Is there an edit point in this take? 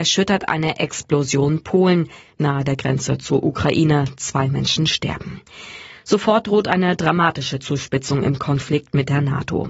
no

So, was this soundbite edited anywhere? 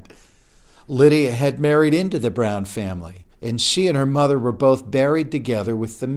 yes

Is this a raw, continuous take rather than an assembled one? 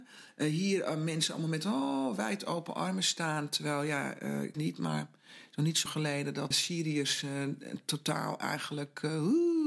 no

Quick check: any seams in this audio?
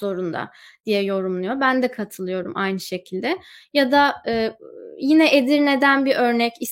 no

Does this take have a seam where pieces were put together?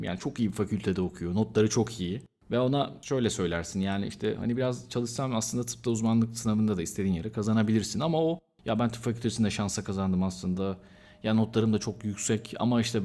no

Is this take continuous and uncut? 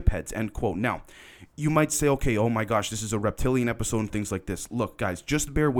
yes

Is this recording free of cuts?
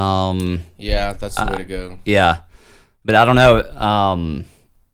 yes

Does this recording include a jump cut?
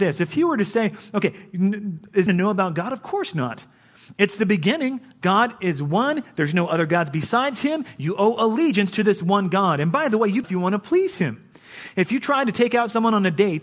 yes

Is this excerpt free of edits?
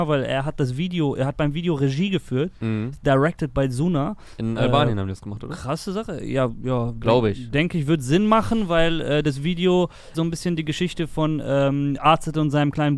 no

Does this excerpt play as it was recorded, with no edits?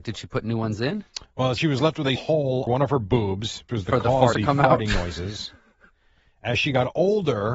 no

